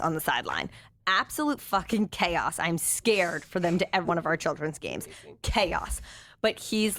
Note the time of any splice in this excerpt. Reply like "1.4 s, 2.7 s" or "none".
4.0 s